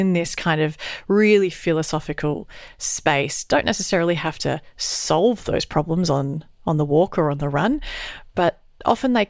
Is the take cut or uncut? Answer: uncut